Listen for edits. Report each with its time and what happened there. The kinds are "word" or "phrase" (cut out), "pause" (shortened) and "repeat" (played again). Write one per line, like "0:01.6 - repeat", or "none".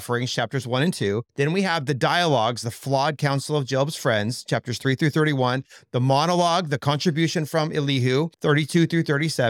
0:01.3 - pause
0:08.3 - pause